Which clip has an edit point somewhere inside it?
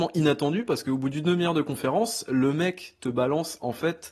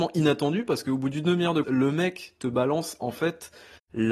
second; 1 cut; at 1.6 s

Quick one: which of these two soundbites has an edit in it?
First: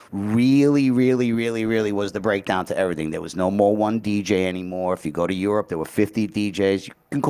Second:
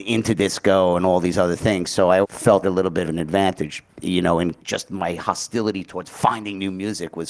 second; 5 cuts; at 2.2 s, 2.6 s, 3.0 s, 3.9 s, 4.6 s

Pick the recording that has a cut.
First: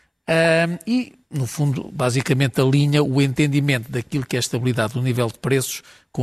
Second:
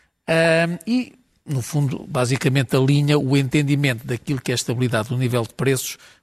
first; 1 cut; at 1.2 s

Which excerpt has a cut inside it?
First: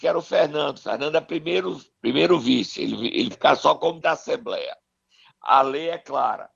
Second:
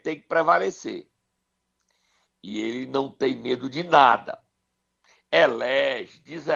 first; 3 cuts; at 2.0 s, 3.3 s, 4.0 s

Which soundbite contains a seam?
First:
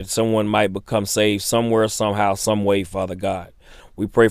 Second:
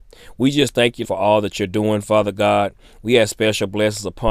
second; 1 cut; at 1.0 s

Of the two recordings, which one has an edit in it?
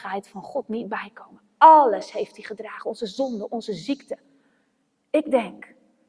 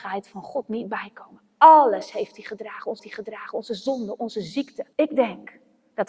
second; 2 cuts; at 3.0 s, 4.9 s

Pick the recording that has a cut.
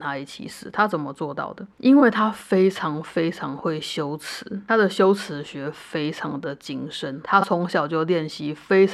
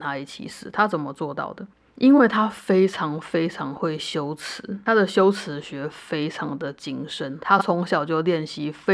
first; 1 cut; at 1.7 s

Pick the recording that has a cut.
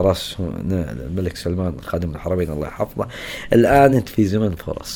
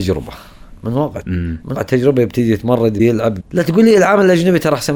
second; 4 cuts; at 1.2 s, 1.7 s, 3.0 s, 3.4 s

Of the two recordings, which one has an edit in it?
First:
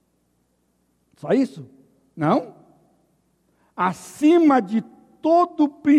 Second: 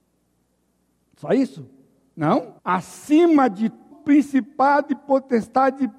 second; 2 cuts; at 2.6 s, 3.9 s

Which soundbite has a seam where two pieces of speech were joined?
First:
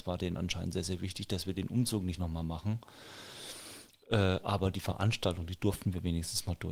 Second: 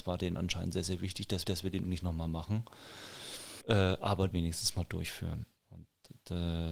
second; 4 cuts; at 1.4 s, 1.8 s, 3.6 s, 4.3 s

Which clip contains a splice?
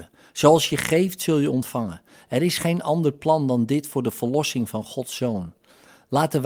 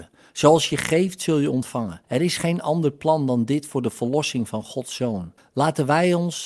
second; 2 cuts; at 2.0 s, 5.4 s

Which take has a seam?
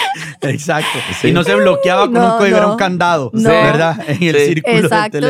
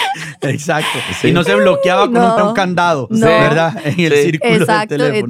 second; 1 cut; at 2.4 s

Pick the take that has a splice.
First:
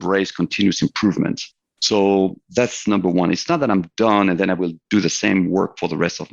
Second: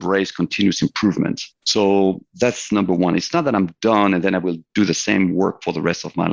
second; 1 cut; at 1.5 s

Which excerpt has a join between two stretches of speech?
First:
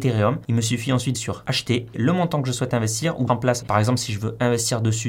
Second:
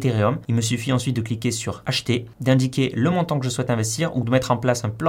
first; 4 cuts; at 1.1 s, 1.9 s, 3.3 s, 3.6 s

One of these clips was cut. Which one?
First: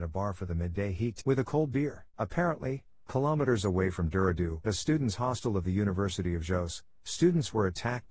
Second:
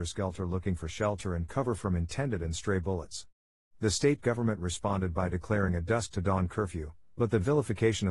first; 3 cuts; at 1.2 s, 2.1 s, 4.6 s

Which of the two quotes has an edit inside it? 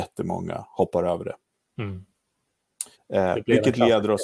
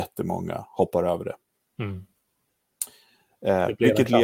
first; 1 cut; at 2.9 s

